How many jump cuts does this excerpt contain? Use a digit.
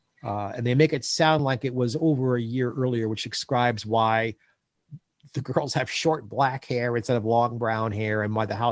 0